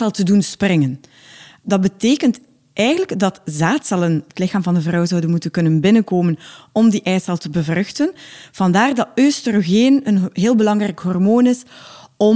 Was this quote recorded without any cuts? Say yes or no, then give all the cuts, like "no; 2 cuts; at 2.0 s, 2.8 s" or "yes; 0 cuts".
yes; 0 cuts